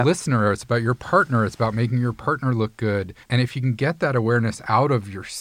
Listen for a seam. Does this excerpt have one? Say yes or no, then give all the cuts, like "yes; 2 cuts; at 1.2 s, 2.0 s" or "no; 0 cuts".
yes; 1 cut; at 3.2 s